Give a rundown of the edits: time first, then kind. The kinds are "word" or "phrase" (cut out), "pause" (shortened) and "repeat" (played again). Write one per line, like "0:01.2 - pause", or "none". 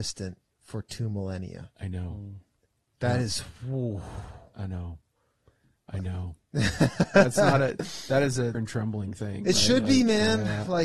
0:08.5 - phrase